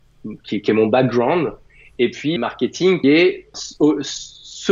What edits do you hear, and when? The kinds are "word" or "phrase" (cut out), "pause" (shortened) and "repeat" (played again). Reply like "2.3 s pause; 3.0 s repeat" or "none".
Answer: 2.4 s word; 3.0 s word; 3.5 s word